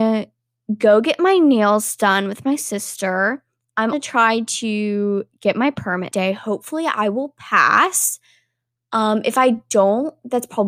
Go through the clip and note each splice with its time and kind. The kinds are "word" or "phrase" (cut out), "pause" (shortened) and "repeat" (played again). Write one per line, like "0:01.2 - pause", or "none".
0:03.9 - phrase
0:06.1 - word